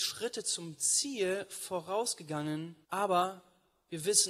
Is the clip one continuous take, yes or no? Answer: no